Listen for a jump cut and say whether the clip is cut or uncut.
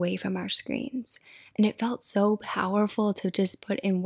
uncut